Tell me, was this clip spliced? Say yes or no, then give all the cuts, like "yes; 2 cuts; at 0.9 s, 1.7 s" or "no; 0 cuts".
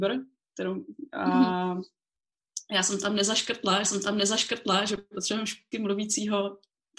yes; 2 cuts; at 3.8 s, 5.7 s